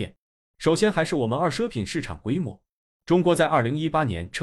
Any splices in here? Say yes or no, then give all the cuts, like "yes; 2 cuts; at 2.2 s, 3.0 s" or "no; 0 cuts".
no; 0 cuts